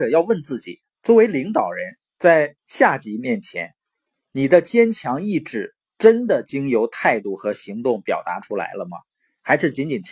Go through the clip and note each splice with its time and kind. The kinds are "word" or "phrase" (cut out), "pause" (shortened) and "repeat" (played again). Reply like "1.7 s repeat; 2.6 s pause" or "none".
2.6 s pause